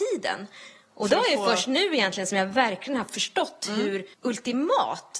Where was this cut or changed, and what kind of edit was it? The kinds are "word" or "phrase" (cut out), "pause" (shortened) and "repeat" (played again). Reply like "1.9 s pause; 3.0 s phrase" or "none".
4.1 s pause